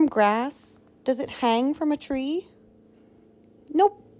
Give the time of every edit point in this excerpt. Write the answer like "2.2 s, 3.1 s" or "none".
none